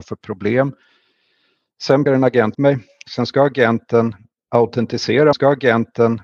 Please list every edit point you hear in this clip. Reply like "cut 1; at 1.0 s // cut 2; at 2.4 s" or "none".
cut 1; at 2.1 s // cut 2; at 2.5 s // cut 3; at 5.3 s